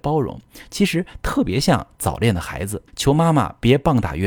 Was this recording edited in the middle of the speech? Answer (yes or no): yes